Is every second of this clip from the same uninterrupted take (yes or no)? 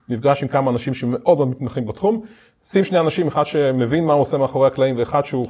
yes